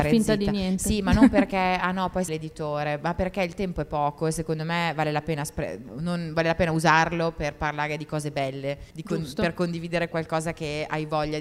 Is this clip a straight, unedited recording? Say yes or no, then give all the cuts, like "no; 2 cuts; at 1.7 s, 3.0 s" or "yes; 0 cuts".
no; 2 cuts; at 2.3 s, 8.9 s